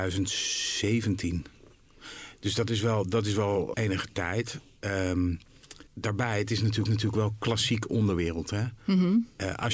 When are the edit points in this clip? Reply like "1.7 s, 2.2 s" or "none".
3.7 s, 5.9 s, 6.9 s